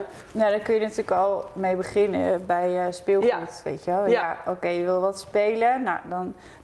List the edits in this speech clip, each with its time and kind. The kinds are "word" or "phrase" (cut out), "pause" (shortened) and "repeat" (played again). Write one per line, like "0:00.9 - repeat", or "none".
none